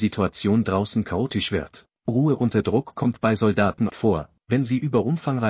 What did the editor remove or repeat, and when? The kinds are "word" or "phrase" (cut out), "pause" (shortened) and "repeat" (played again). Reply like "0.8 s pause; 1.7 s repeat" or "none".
2.0 s pause; 3.9 s word